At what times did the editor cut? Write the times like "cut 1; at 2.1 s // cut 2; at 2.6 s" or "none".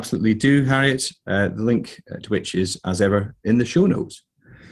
none